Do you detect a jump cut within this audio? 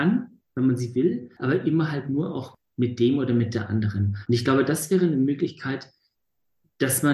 no; 0 cuts

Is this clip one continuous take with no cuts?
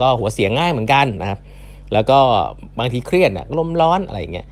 yes; 0 cuts

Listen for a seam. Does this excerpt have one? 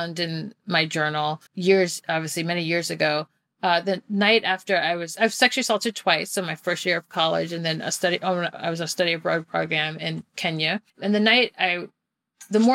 yes; 2 cuts; at 1.5 s, 10.9 s

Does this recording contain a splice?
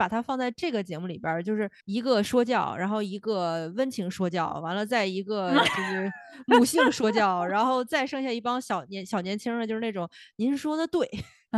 yes; 1 cut; at 1.8 s

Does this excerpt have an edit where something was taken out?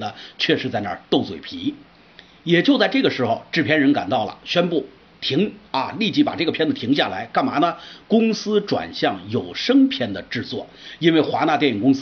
no; 0 cuts

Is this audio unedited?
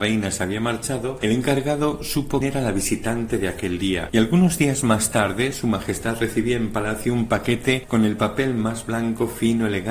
no; 1 cut; at 2.4 s

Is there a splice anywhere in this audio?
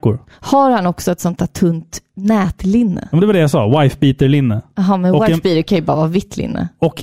no; 0 cuts

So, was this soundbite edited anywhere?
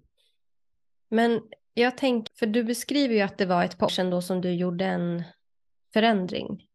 yes; 2 cuts; at 2.3 s, 3.9 s

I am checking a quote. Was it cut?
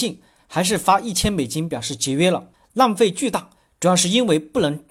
yes; 1 cut; at 2.5 s

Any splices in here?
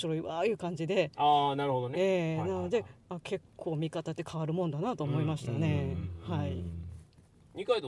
no; 0 cuts

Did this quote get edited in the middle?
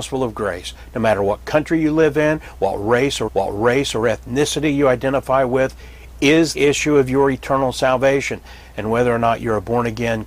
yes; 2 cuts; at 3.3 s, 6.5 s

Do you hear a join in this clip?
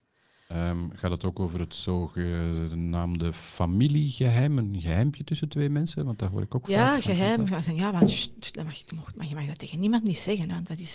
no; 0 cuts

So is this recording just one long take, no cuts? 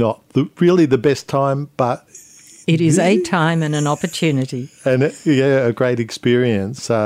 yes; 0 cuts

